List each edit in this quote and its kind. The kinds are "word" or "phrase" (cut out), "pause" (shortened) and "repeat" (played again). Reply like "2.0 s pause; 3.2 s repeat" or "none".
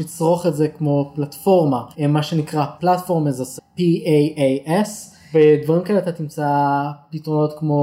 1.9 s pause; 2.8 s word; 3.6 s word

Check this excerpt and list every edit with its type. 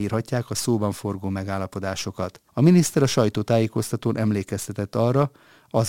2.5 s pause

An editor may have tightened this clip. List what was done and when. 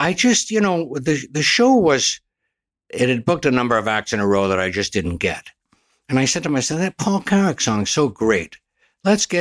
none

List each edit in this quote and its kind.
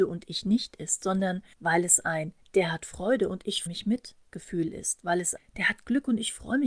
1.5 s pause; 3.7 s word; 4.3 s pause; 5.4 s word

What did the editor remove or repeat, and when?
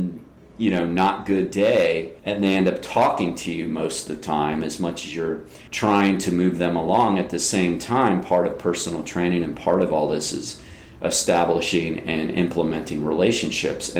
2.2 s pause; 5.7 s pause

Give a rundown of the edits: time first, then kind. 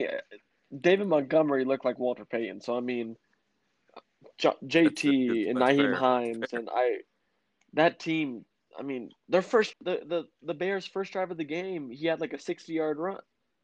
9.7 s word

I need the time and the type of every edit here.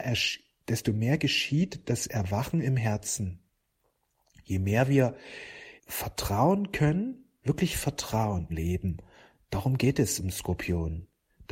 5.8 s pause; 8.5 s phrase

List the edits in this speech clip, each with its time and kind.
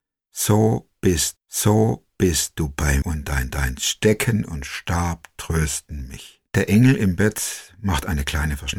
1.4 s repeat; 3.0 s word; 3.5 s repeat; 6.5 s pause

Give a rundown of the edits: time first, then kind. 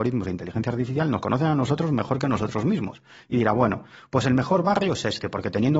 none

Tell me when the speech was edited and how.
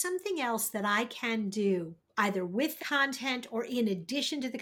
2.0 s pause; 2.8 s word

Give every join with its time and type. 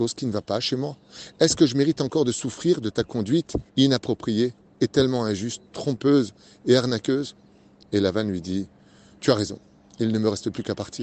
3.7 s pause

